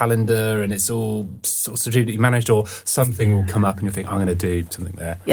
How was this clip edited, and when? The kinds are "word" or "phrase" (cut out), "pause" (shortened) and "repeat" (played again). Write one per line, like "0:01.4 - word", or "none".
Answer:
none